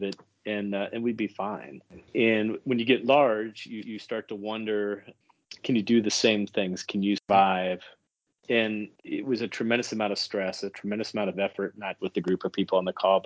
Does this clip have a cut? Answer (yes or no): yes